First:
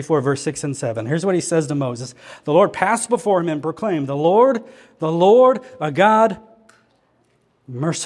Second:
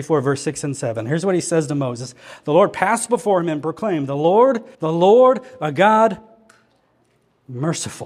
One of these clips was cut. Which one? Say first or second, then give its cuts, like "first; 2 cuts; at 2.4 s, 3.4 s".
second; 1 cut; at 4.7 s